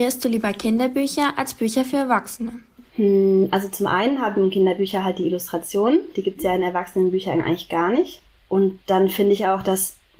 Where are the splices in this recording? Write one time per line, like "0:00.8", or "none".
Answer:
none